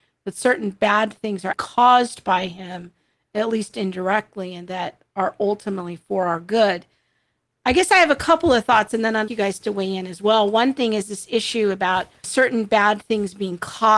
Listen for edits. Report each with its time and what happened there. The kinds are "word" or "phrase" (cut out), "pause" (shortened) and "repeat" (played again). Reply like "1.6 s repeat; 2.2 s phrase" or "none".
1.5 s word; 9.3 s word; 12.2 s word